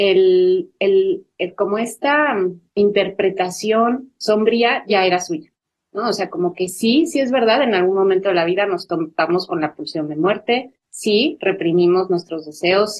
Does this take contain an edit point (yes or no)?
no